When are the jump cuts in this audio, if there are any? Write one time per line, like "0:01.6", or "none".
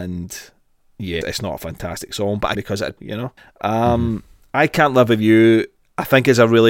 0:01.2
0:02.6
0:03.0
0:03.4